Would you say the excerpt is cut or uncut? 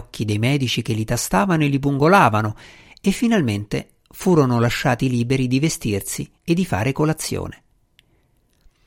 cut